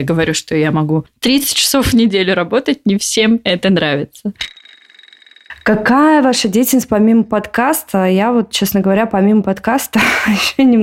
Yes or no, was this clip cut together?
no